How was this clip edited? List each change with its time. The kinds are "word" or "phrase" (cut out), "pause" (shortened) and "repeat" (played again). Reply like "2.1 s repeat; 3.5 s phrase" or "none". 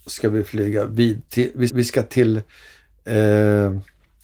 1.3 s word; 1.7 s repeat